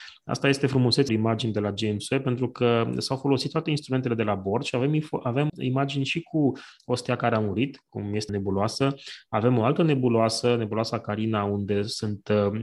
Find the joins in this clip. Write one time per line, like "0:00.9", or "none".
0:01.1
0:05.5
0:08.3